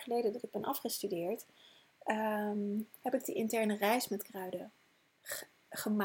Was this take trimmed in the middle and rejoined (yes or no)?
no